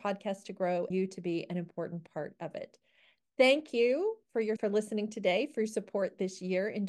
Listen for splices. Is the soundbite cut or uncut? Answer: cut